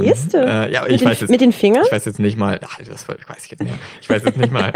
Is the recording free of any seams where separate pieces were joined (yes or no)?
no